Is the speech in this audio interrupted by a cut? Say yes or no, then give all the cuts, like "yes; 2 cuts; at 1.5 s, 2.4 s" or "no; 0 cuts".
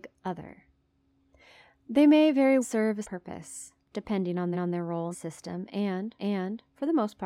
yes; 5 cuts; at 2.6 s, 3.0 s, 4.5 s, 5.1 s, 6.2 s